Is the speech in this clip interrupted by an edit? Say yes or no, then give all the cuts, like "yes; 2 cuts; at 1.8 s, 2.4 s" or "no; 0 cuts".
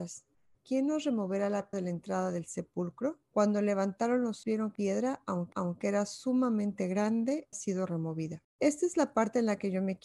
yes; 7 cuts; at 1.7 s, 3.2 s, 4.4 s, 4.8 s, 5.5 s, 7.5 s, 8.5 s